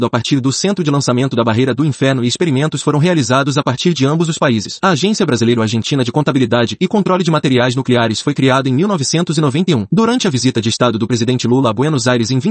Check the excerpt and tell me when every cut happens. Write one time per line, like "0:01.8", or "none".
none